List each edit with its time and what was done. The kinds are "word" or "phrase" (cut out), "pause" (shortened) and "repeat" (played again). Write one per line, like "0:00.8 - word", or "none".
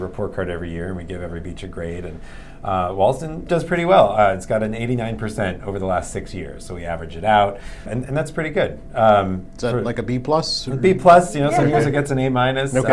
0:03.5 - word
0:07.9 - word